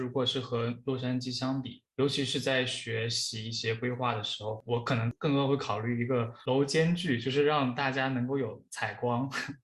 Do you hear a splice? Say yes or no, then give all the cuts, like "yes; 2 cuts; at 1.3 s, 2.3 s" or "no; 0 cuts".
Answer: no; 0 cuts